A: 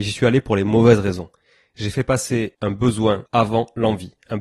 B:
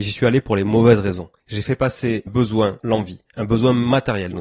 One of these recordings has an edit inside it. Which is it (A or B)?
B